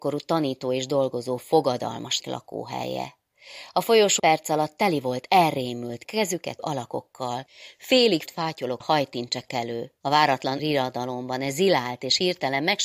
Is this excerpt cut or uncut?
cut